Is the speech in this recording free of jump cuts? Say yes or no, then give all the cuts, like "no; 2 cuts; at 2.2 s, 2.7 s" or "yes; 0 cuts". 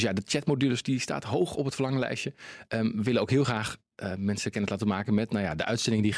yes; 0 cuts